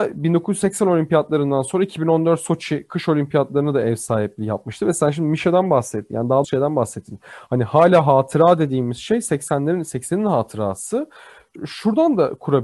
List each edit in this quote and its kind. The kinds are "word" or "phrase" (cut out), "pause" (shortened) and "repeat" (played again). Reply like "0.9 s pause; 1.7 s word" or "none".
6.4 s word